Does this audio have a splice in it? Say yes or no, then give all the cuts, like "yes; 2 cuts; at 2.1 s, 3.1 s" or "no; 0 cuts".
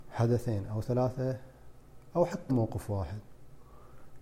yes; 2 cuts; at 2.1 s, 2.5 s